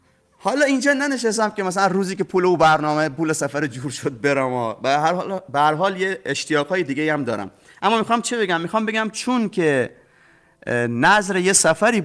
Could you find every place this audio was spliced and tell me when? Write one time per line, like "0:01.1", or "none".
none